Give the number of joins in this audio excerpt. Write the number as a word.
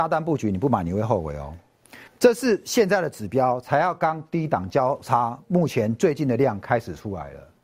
one